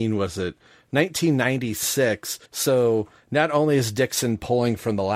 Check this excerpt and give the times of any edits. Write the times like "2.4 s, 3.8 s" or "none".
2.5 s